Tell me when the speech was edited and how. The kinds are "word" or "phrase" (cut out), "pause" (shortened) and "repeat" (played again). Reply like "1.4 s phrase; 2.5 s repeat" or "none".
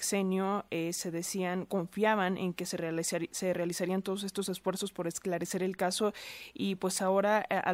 none